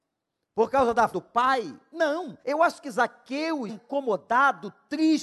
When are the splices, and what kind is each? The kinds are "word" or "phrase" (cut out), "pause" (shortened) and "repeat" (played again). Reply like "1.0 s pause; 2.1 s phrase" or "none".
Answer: 1.1 s word; 2.4 s pause; 3.7 s word

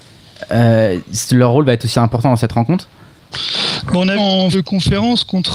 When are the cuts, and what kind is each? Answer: 1.9 s word; 4.2 s word; 4.5 s word

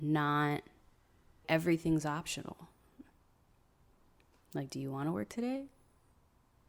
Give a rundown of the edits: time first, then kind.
1.4 s word

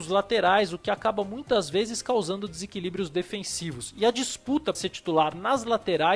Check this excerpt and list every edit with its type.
4.7 s word

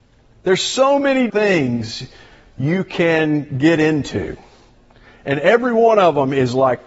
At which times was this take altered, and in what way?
1.3 s word

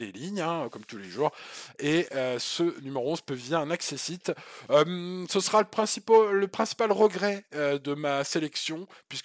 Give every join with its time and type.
none

